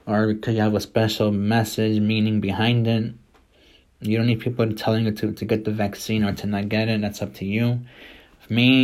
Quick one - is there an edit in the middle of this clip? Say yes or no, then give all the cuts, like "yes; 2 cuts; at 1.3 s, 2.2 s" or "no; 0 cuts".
no; 0 cuts